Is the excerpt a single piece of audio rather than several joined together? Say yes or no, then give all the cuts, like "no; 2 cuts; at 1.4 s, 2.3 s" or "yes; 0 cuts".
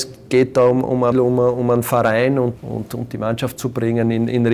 no; 3 cuts; at 1.1 s, 2.6 s, 3.6 s